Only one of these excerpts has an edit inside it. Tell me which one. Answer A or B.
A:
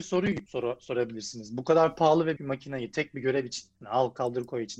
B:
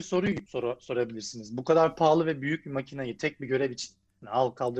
A